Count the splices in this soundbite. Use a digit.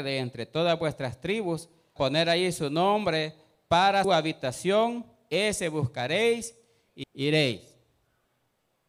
3